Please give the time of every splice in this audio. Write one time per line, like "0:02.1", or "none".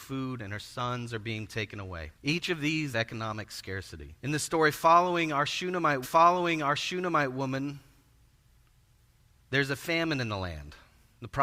0:02.2
0:02.9
0:04.2
0:06.0